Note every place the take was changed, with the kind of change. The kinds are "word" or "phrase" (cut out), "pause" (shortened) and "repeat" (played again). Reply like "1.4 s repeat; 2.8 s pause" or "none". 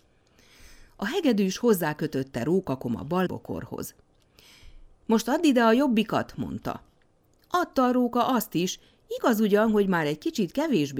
3.3 s phrase